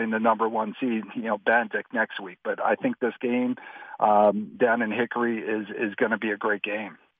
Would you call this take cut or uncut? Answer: cut